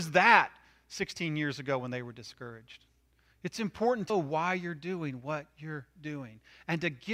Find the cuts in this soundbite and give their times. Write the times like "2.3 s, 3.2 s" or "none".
4.1 s

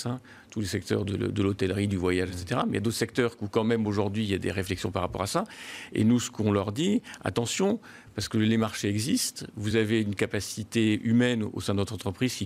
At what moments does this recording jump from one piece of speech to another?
none

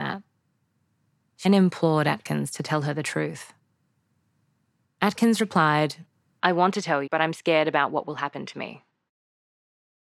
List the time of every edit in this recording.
1.4 s, 7.1 s

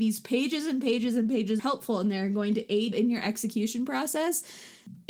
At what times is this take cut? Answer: 1.6 s, 2.9 s

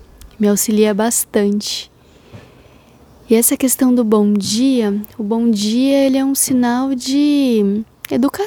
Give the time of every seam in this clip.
none

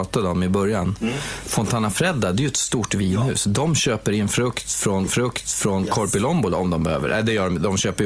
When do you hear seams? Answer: 5.1 s

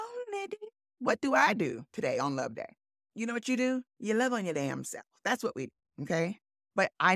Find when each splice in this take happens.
2.9 s, 3.9 s

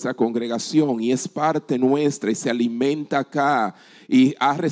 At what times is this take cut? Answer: none

